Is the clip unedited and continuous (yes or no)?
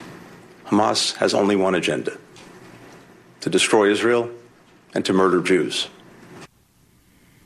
yes